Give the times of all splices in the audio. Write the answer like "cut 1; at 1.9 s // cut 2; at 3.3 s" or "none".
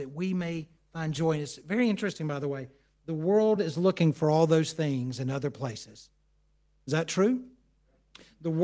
none